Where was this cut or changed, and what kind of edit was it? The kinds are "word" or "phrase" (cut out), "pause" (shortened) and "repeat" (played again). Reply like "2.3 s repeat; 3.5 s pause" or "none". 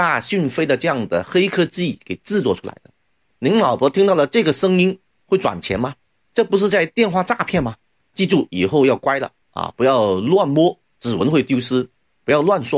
none